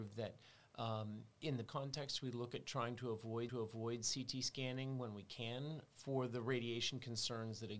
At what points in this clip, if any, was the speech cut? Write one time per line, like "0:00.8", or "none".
0:01.3
0:01.7
0:03.5
0:05.9